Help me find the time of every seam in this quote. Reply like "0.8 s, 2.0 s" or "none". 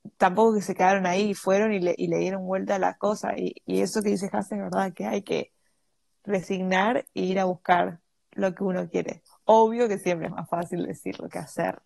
none